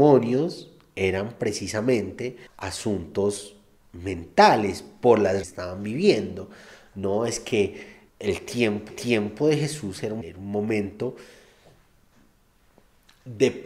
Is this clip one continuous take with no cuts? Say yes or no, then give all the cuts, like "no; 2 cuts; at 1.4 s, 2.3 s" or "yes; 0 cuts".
no; 5 cuts; at 2.5 s, 5.4 s, 8.1 s, 8.9 s, 10.2 s